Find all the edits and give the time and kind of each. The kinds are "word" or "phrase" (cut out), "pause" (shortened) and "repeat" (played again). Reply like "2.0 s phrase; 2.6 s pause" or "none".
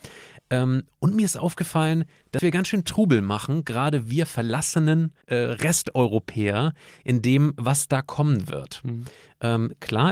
5.2 s pause

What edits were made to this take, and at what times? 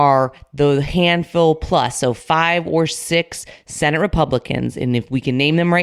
none

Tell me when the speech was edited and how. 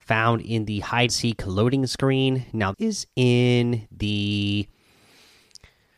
1.1 s word; 2.7 s word

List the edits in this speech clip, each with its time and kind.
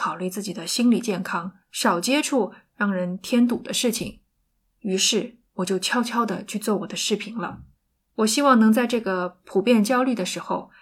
1.6 s pause; 4.5 s pause; 5.5 s pause; 7.8 s pause

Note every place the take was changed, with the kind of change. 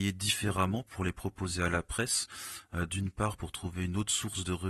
none

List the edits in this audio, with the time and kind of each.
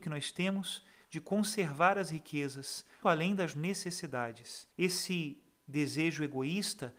3.0 s word; 3.5 s word; 4.7 s pause

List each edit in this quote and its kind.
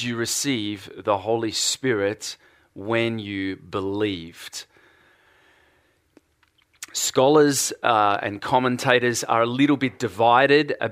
none

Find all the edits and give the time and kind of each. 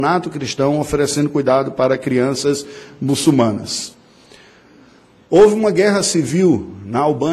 none

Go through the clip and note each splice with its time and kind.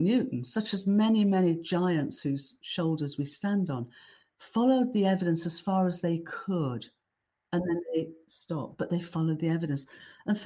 none

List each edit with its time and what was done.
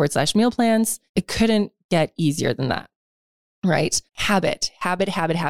1.1 s pause; 4.1 s pause

